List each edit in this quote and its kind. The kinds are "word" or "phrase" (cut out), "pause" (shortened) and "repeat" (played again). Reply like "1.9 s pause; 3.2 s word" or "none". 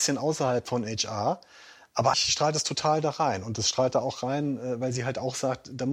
2.1 s word